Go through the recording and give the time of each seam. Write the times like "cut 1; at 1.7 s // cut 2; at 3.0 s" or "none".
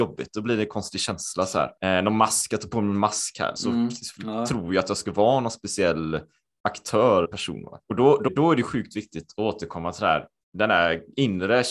cut 1; at 1.8 s // cut 2; at 3.6 s // cut 3; at 7.2 s // cut 4; at 7.8 s // cut 5; at 8.3 s